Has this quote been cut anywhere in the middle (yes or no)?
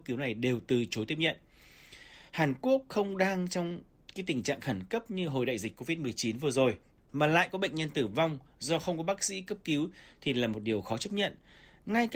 no